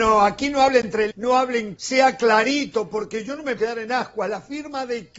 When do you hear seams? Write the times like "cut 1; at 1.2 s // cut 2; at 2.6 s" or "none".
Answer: cut 1; at 1.1 s // cut 2; at 1.8 s // cut 3; at 3.6 s